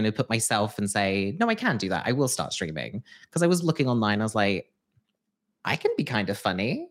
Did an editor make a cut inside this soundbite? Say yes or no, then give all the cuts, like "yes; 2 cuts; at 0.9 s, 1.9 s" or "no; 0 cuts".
no; 0 cuts